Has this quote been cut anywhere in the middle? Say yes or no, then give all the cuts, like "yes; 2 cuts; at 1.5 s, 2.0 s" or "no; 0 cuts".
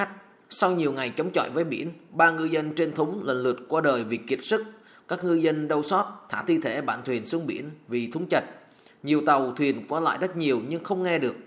no; 0 cuts